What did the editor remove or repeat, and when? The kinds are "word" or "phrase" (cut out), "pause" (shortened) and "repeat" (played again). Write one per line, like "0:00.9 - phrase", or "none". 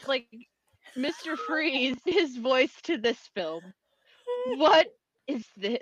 0:02.1 - word